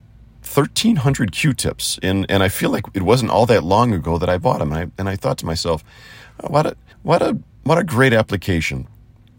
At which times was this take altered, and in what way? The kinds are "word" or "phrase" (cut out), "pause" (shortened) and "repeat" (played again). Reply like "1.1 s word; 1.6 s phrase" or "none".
6.9 s pause; 7.5 s pause